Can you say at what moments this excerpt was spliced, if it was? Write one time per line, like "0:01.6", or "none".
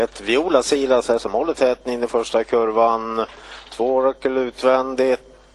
none